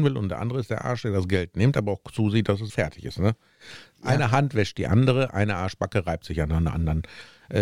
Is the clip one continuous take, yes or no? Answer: no